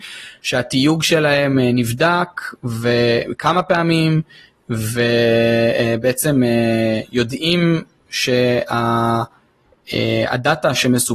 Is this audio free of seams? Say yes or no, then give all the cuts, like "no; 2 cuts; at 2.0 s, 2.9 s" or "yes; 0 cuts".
yes; 0 cuts